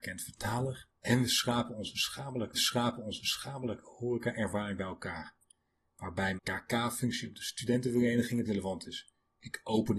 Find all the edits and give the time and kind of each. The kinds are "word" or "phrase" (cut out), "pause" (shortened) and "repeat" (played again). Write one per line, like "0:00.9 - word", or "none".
0:01.0 - pause
0:02.5 - repeat
0:06.4 - word
0:08.4 - word